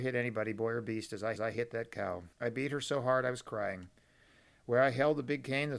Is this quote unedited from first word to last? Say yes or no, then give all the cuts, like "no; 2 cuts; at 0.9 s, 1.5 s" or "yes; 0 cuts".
no; 2 cuts; at 1.4 s, 2.3 s